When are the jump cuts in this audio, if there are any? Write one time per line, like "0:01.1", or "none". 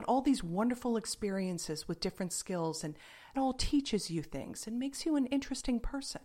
0:03.3